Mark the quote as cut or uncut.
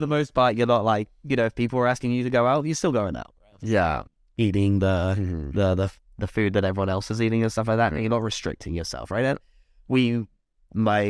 cut